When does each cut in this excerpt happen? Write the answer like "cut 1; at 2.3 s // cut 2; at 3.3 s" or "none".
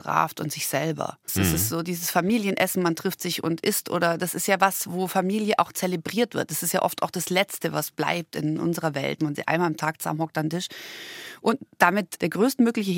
cut 1; at 1.2 s // cut 2; at 4.9 s // cut 3; at 9.2 s